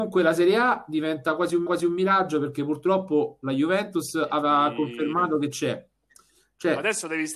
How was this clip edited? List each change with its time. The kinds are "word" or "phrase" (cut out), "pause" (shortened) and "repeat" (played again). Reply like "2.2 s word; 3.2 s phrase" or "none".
1.7 s repeat